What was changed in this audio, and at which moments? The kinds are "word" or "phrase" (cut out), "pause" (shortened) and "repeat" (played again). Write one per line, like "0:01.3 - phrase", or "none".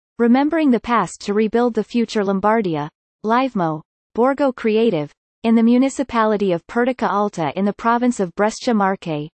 none

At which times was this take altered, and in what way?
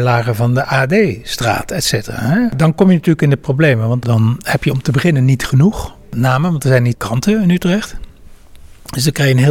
0:04.0 - word
0:06.9 - word

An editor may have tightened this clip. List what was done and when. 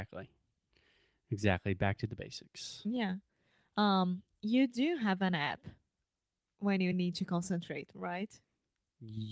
none

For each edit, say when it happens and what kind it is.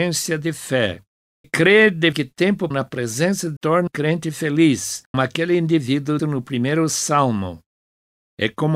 0:01.4 - word
0:02.1 - word
0:02.7 - word
0:03.6 - word
0:03.9 - word
0:05.1 - word
0:06.2 - word

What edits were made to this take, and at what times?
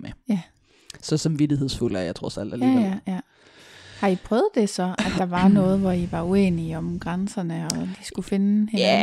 none

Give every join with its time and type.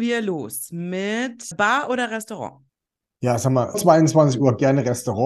0:01.5 - word
0:03.7 - word

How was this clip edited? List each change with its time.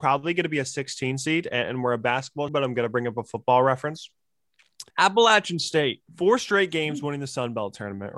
0:02.5 - word
0:04.9 - pause
0:06.1 - pause

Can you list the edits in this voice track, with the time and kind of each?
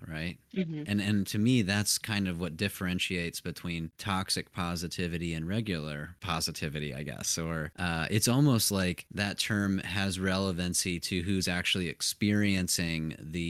none

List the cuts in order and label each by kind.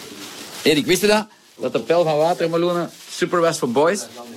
none

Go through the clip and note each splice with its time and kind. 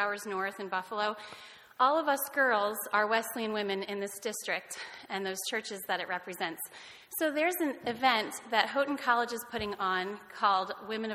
none

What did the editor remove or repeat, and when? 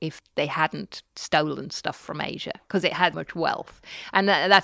0:03.1 - word

